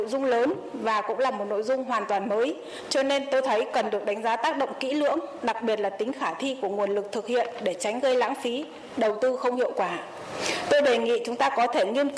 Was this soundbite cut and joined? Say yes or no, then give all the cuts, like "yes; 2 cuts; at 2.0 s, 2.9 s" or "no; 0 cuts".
no; 0 cuts